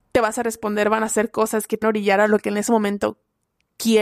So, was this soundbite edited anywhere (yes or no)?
yes